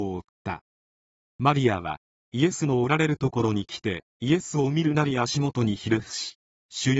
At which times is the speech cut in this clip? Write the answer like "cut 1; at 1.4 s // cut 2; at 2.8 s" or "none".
cut 1; at 4.1 s